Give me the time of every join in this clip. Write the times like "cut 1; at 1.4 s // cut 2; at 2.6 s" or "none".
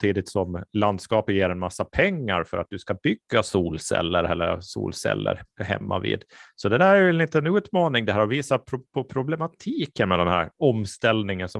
none